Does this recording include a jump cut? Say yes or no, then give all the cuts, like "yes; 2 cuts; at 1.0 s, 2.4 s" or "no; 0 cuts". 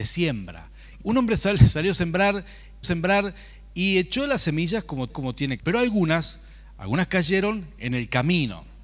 yes; 4 cuts; at 1.0 s, 2.8 s, 5.1 s, 5.6 s